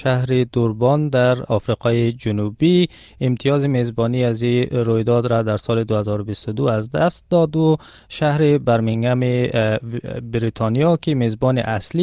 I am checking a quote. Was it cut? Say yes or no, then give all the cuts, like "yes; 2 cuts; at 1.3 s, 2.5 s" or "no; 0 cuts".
no; 0 cuts